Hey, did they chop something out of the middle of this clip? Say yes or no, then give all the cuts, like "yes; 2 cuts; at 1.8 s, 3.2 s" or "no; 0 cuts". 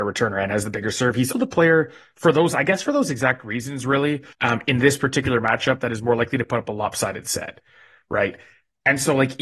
yes; 2 cuts; at 1.3 s, 4.3 s